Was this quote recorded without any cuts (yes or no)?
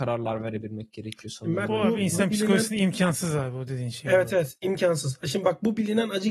yes